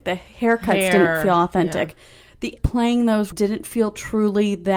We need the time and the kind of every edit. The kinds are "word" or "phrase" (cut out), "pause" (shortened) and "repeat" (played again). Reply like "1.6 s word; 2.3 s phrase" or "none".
2.6 s word; 3.3 s word